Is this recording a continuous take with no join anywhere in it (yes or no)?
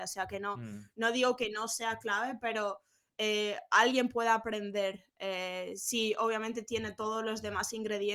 yes